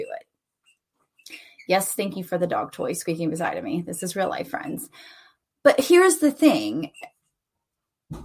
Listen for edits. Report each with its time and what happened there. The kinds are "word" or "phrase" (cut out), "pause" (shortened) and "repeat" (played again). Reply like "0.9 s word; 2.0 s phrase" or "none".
none